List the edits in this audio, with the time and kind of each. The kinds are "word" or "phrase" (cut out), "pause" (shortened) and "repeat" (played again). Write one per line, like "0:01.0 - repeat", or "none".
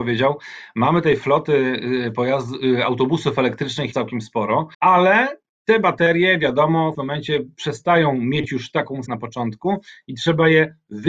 0:03.9 - word
0:04.7 - pause
0:06.9 - phrase
0:09.1 - phrase